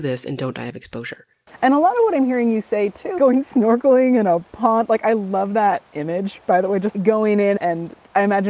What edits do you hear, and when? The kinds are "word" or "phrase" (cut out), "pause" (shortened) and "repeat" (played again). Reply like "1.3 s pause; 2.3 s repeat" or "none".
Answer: 3.2 s word; 6.9 s word